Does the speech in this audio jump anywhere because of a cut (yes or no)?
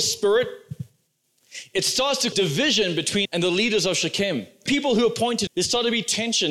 yes